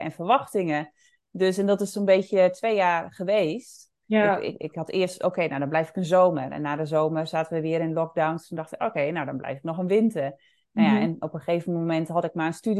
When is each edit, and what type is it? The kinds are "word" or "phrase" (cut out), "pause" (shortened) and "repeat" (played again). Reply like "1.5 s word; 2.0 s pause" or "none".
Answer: none